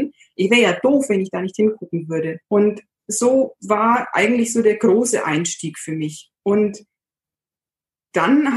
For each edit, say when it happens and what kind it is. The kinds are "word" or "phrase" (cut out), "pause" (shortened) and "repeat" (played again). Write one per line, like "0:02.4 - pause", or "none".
0:02.4 - pause
0:06.4 - pause